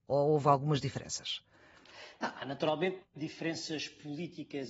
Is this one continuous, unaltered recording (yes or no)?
yes